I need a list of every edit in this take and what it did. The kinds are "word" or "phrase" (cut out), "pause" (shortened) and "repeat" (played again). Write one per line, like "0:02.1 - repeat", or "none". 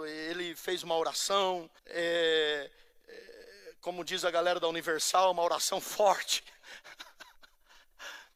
0:01.8 - pause